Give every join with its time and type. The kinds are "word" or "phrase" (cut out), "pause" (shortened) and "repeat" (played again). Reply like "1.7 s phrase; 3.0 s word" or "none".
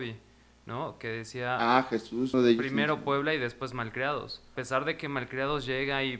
2.3 s word; 4.6 s word